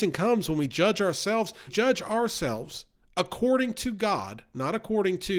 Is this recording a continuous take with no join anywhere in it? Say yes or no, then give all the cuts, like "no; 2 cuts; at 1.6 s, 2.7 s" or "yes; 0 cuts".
no; 1 cut; at 1.7 s